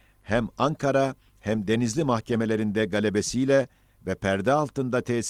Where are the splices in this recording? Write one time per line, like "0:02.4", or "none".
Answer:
none